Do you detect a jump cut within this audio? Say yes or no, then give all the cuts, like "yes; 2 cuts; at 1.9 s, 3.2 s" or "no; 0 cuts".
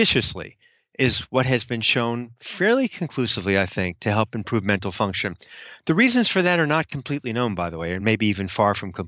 no; 0 cuts